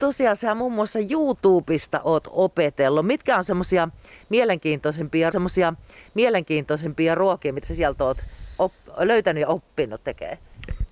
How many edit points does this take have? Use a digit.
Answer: 2